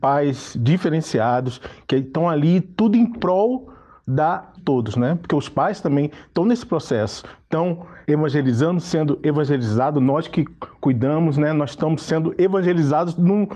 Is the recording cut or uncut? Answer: cut